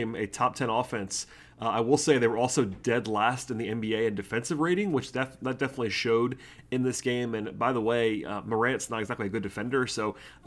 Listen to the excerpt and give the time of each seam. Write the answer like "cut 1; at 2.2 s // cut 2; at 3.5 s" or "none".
none